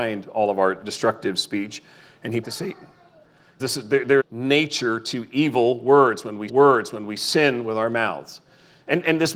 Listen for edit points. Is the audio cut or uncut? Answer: cut